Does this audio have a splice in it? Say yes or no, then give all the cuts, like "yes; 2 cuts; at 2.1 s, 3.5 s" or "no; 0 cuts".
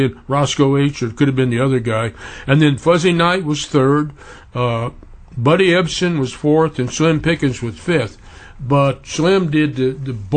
no; 0 cuts